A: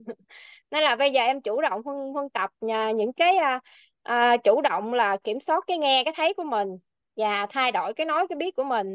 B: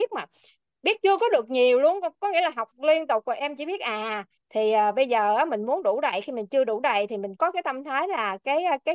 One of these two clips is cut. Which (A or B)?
B